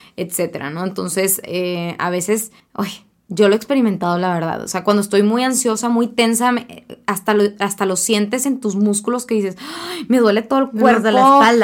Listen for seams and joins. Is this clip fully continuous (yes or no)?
no